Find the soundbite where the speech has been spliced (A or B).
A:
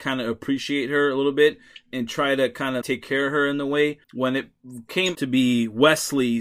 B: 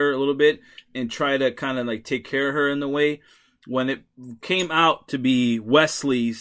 A